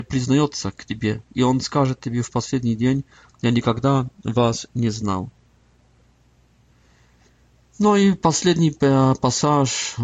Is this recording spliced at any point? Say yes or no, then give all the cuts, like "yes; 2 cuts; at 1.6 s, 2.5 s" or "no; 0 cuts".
no; 0 cuts